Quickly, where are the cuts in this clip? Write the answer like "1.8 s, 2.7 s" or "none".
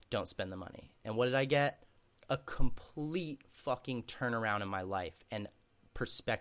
none

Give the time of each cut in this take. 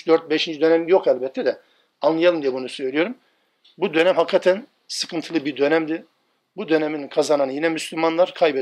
none

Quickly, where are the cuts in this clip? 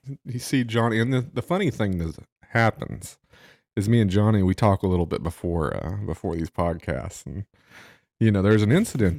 none

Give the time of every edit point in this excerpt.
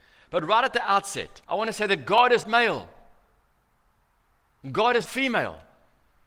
1.4 s, 2.4 s, 5.1 s

